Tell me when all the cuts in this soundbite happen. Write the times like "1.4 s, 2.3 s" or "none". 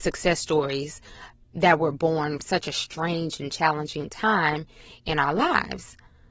2.4 s